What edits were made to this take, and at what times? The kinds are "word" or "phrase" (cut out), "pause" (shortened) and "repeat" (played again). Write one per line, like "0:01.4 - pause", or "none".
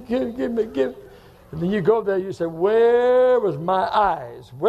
none